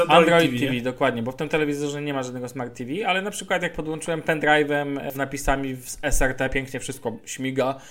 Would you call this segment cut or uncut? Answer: cut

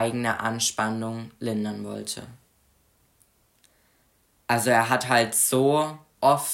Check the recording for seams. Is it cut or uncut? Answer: uncut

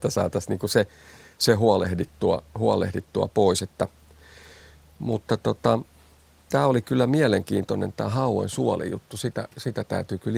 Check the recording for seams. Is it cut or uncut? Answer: uncut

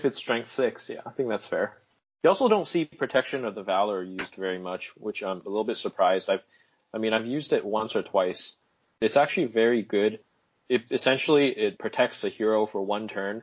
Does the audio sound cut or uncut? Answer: uncut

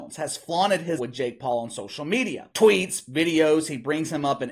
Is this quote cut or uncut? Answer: cut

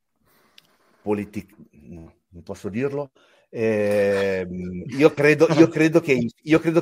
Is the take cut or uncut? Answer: uncut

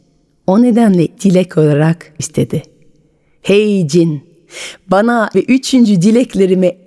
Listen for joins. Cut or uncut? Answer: cut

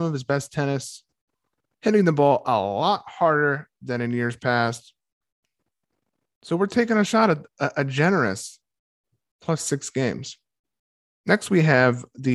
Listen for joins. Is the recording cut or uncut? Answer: uncut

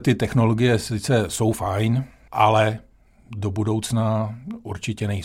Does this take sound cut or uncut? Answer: uncut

